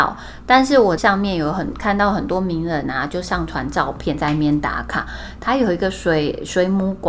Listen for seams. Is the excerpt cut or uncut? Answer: cut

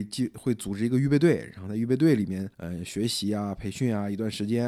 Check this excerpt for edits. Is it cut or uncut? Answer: cut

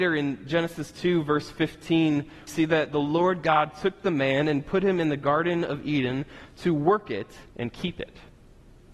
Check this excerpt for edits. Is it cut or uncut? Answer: cut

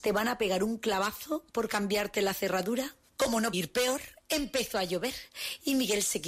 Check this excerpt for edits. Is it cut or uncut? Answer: cut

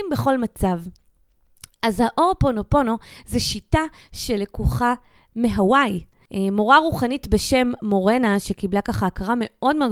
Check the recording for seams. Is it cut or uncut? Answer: uncut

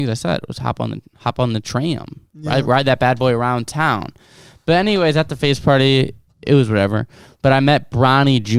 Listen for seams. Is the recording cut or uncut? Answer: uncut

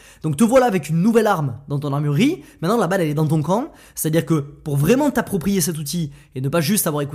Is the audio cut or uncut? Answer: uncut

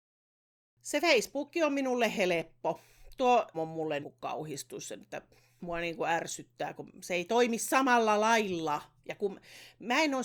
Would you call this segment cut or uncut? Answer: cut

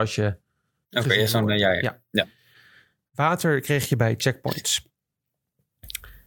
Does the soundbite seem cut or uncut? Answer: uncut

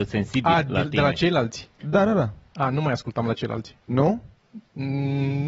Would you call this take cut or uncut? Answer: cut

